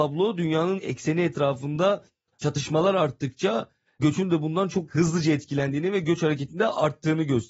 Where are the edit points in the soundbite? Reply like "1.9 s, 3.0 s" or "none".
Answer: none